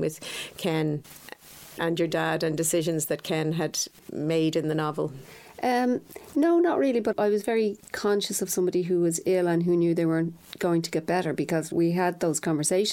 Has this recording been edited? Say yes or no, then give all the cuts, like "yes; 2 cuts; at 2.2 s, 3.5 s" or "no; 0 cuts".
no; 0 cuts